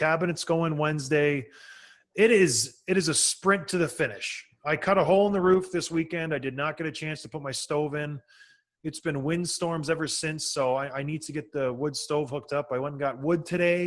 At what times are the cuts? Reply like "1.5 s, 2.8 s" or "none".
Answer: none